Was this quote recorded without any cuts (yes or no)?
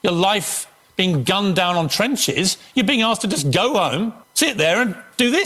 no